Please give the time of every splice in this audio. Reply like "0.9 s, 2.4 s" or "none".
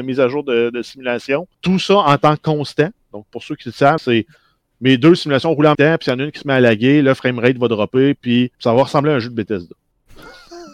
1.5 s, 4.0 s, 5.7 s, 8.5 s